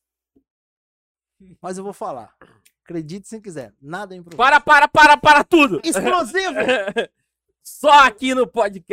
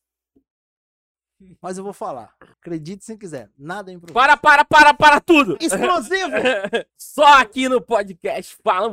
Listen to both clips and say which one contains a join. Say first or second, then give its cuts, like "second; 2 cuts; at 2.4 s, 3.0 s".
second; 2 cuts; at 2.5 s, 6.9 s